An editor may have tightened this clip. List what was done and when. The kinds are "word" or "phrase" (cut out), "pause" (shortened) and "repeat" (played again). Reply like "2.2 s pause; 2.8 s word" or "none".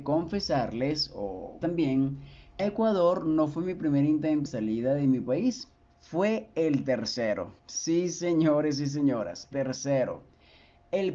1.6 s word; 2.6 s phrase; 4.5 s word; 5.8 s pause; 7.6 s pause; 9.5 s word

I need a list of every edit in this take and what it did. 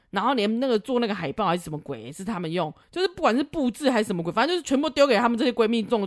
2.8 s pause

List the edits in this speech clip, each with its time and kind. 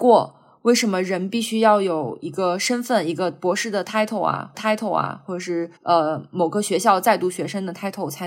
4.5 s repeat; 5.8 s pause

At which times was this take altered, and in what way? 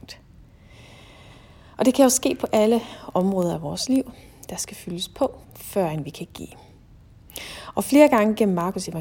5.4 s pause

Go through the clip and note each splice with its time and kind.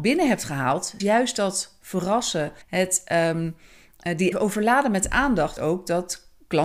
1.0 s word; 2.6 s pause; 4.3 s phrase; 5.6 s word

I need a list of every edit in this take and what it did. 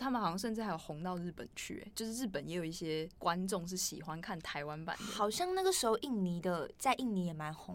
3.1 s pause

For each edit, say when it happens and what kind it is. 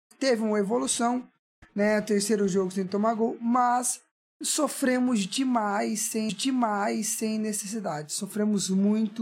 6.3 s repeat

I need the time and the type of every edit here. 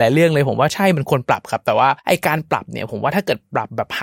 2.0 s pause

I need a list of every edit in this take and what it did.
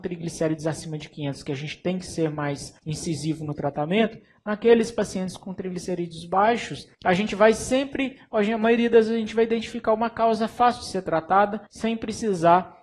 2.8 s pause; 6.9 s pause; 11.7 s pause

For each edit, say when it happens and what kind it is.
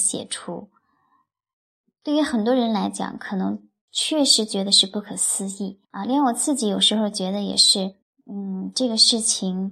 5.8 s pause; 8.0 s pause

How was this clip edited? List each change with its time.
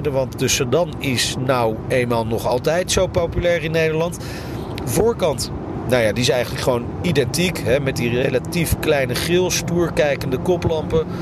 2.9 s word

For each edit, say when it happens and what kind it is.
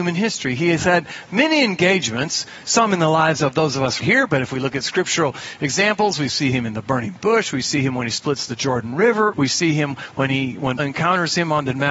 4.0 s word; 9.3 s word; 10.8 s word

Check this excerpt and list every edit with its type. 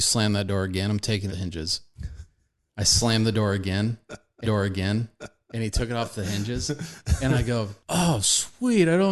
1.3 s phrase; 4.4 s repeat; 7.8 s pause

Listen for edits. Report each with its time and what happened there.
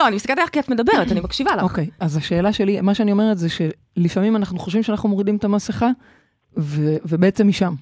none

